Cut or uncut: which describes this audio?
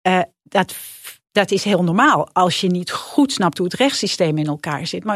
uncut